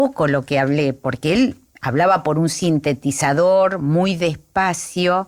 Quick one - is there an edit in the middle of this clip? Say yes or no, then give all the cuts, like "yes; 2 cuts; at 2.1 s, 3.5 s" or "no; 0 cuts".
no; 0 cuts